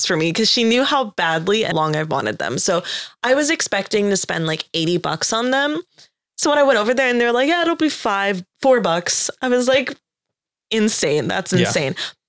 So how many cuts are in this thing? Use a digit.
1